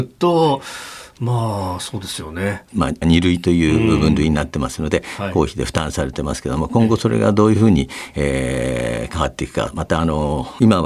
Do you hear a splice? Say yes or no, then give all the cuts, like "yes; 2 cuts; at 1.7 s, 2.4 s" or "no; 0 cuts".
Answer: yes; 1 cut; at 3.0 s